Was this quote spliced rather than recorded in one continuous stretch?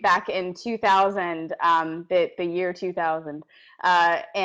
no; 0 cuts

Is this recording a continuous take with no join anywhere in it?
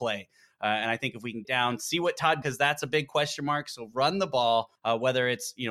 no; 3 cuts; at 1.4 s, 2.4 s, 4.8 s

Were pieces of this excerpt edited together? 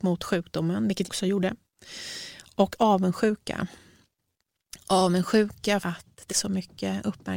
yes; 3 cuts; at 1.1 s, 5.8 s, 6.3 s

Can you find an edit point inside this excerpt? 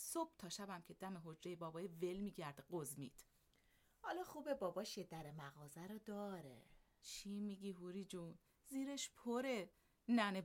no; 0 cuts

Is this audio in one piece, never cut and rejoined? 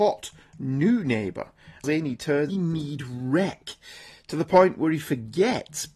no; 2 cuts; at 1.8 s, 2.5 s

